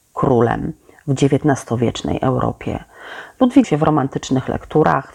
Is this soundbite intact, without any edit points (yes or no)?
no